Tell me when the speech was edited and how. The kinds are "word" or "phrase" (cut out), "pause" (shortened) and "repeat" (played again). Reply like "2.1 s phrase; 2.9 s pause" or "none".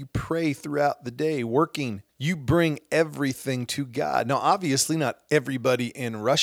2.1 s pause